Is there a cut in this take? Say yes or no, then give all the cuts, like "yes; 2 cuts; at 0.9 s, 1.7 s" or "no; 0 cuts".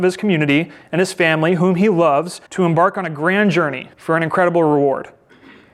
yes; 2 cuts; at 2.5 s, 3.9 s